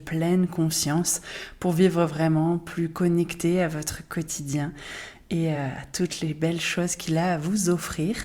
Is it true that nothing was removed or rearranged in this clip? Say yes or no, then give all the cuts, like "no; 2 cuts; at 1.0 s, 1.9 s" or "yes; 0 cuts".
yes; 0 cuts